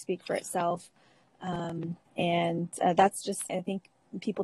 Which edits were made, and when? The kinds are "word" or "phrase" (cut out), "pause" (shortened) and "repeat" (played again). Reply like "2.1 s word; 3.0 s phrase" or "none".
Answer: 2.1 s pause; 3.5 s word